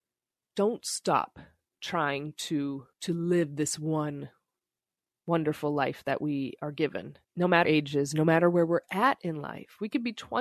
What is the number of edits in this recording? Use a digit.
3